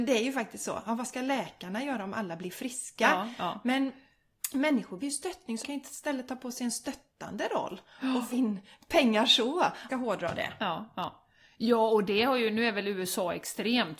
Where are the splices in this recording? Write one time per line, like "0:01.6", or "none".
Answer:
0:05.0
0:05.6
0:08.3
0:09.9